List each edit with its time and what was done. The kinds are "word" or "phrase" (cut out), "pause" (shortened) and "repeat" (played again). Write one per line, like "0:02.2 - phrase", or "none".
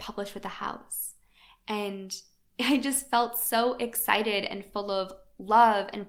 none